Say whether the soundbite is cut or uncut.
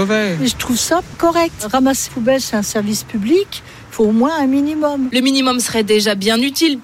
cut